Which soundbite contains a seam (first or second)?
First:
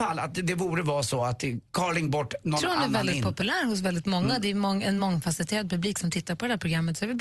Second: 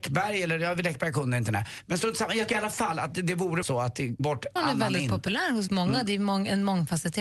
second